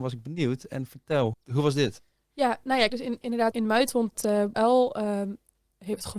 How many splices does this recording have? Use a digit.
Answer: 5